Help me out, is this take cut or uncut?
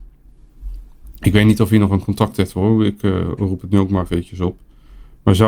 uncut